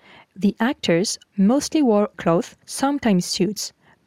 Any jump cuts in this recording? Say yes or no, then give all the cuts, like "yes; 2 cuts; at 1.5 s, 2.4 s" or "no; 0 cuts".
yes; 3 cuts; at 1.2 s, 2.1 s, 2.6 s